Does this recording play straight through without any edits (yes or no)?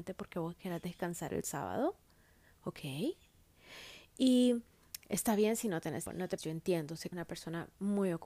no